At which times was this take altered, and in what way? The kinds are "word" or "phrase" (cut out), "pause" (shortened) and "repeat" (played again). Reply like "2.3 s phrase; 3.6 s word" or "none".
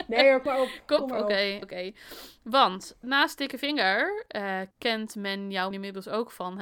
1.0 s word; 1.6 s word; 3.0 s word; 4.7 s pause; 5.7 s word